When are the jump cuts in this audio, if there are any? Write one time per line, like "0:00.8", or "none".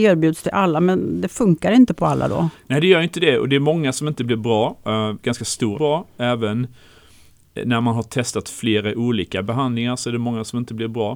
0:05.7